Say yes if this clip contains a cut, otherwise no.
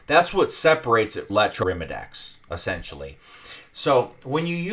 yes